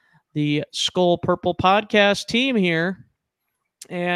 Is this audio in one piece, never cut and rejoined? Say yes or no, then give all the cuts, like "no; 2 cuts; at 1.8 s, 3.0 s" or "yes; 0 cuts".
yes; 0 cuts